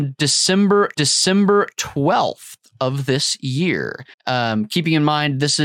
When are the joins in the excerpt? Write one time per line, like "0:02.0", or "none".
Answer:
0:00.9
0:04.1